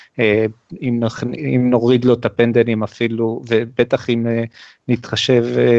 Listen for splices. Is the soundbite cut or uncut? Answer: uncut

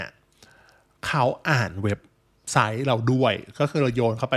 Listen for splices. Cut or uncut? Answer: uncut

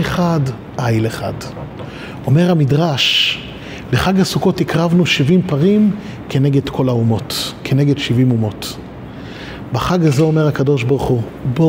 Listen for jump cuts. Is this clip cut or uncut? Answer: uncut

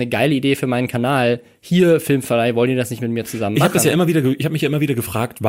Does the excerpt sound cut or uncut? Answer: uncut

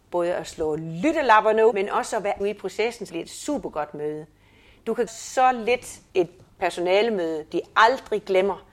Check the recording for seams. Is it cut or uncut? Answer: cut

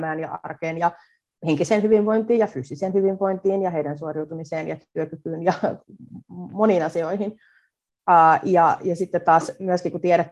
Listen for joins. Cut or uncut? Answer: uncut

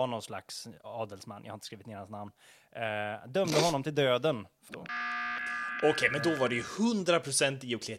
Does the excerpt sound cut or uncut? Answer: cut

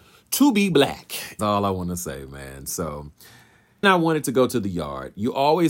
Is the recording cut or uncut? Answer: cut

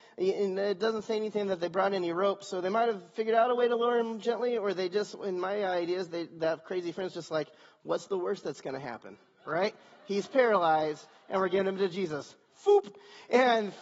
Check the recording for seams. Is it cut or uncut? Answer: uncut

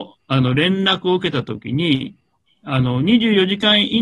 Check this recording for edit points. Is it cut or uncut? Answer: uncut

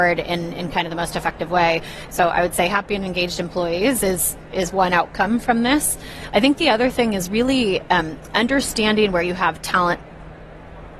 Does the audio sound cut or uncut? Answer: uncut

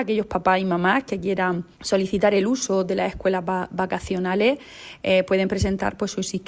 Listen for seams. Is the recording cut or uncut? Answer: uncut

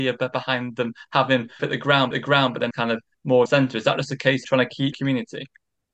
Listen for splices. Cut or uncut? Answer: cut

